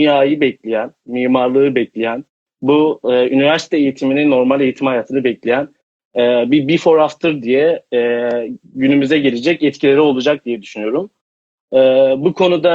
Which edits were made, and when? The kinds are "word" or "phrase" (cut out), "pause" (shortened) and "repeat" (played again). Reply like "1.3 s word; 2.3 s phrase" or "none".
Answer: none